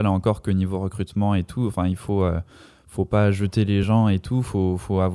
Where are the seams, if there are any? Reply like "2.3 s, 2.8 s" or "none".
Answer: none